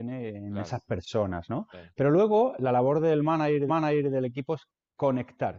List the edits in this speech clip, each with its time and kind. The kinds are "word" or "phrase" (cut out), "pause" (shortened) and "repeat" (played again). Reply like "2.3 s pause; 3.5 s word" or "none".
3.7 s repeat